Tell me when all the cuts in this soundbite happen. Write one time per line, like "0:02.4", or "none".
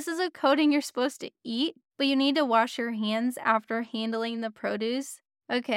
none